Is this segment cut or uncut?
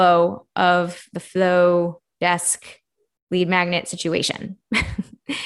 uncut